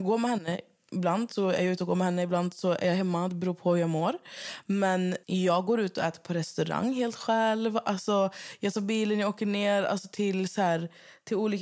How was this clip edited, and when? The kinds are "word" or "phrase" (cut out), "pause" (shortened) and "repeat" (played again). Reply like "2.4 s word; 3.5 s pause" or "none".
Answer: 5.2 s pause

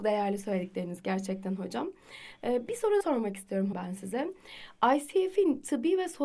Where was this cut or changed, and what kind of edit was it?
3.0 s word; 3.7 s word

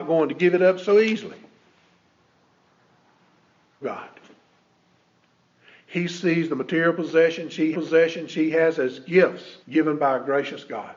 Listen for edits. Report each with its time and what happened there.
3.8 s phrase; 7.7 s repeat; 9.6 s pause

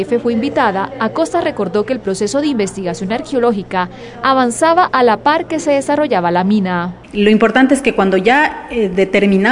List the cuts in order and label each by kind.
7.0 s pause

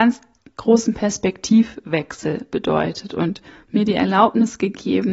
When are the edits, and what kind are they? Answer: 3.5 s pause

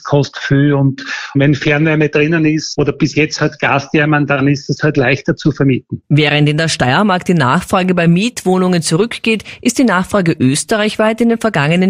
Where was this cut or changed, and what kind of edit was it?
none

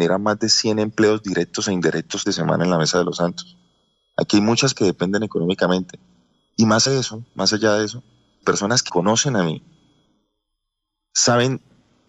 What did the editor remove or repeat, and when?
2.3 s phrase; 4.7 s word; 6.9 s word; 7.3 s pause; 8.4 s word; 8.9 s word

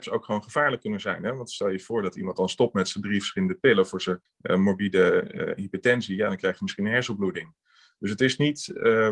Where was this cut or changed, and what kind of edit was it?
4.2 s pause

